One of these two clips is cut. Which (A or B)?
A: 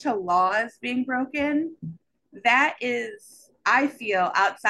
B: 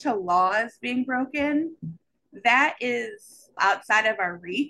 B